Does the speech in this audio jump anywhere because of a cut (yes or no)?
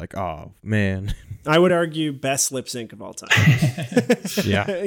no